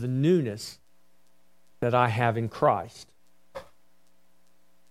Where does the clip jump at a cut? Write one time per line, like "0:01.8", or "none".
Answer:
none